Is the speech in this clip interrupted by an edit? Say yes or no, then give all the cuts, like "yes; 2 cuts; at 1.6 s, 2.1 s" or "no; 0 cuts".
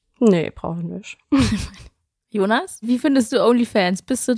no; 0 cuts